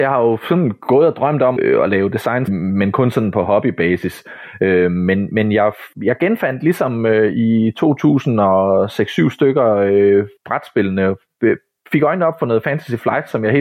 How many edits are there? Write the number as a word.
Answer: four